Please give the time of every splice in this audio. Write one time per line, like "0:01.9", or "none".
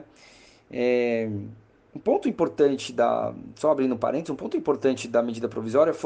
0:01.7